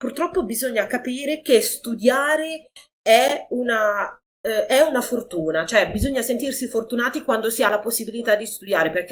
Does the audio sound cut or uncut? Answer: uncut